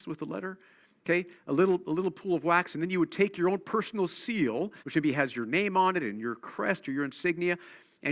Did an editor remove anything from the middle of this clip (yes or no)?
yes